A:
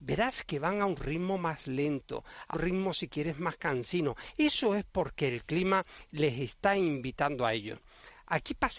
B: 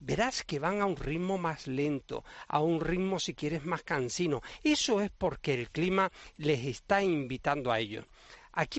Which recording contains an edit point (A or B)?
A